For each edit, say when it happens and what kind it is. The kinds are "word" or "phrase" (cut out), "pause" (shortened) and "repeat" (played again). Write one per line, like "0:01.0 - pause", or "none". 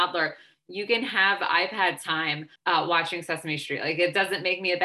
0:02.6 - pause